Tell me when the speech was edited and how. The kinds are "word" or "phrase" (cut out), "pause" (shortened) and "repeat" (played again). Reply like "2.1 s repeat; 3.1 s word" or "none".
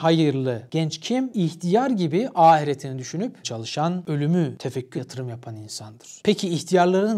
3.4 s word; 4.9 s phrase